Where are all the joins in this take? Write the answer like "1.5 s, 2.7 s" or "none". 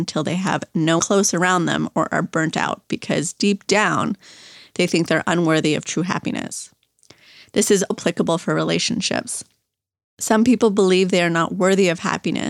1.0 s, 7.9 s